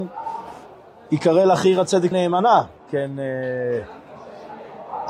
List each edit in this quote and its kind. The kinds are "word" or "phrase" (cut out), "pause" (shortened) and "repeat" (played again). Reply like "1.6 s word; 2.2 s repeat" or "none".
2.1 s word